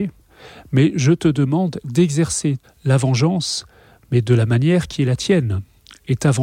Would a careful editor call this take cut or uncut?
cut